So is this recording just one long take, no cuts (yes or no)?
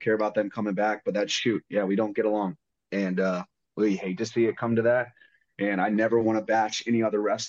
yes